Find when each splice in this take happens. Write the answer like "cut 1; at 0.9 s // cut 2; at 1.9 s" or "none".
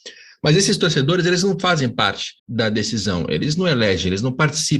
cut 1; at 2.4 s